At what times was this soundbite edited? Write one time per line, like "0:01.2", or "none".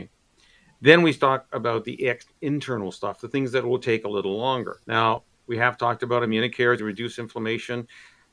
0:04.8
0:06.8